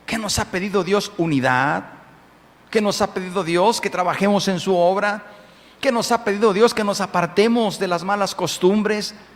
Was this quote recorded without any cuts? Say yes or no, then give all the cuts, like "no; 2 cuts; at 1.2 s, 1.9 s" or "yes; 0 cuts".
yes; 0 cuts